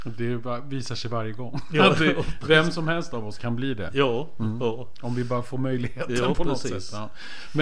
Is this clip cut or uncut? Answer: uncut